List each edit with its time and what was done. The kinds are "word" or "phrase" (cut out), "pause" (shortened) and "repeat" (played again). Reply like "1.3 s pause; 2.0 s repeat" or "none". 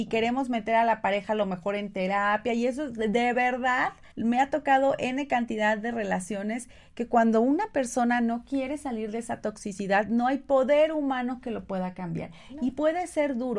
4.1 s pause